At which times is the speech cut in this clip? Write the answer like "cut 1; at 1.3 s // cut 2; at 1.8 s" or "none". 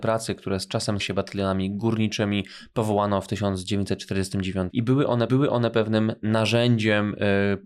cut 1; at 1.0 s // cut 2; at 4.7 s // cut 3; at 5.3 s